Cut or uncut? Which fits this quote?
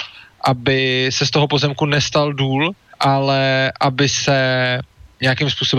cut